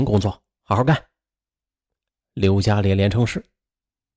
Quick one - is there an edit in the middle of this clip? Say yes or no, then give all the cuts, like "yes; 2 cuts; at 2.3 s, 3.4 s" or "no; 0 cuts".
no; 0 cuts